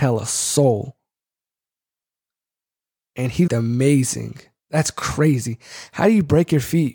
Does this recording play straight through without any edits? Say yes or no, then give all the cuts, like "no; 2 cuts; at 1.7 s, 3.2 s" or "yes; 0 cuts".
no; 1 cut; at 3.5 s